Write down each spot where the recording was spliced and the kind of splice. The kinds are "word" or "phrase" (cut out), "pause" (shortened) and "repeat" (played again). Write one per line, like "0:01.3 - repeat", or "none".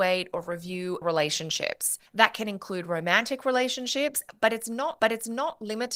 0:01.0 - word
0:02.1 - pause
0:05.0 - repeat